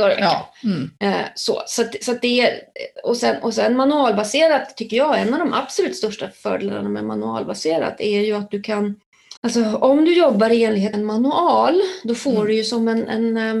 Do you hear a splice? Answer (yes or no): yes